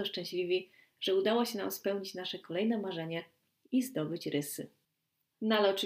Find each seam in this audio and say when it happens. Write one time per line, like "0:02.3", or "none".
none